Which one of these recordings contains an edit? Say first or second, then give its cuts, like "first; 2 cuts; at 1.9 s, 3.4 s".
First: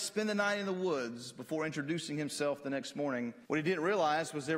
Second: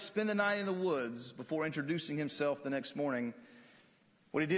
first; 1 cut; at 3.4 s